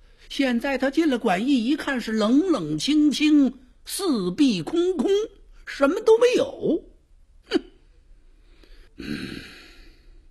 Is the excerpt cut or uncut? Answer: cut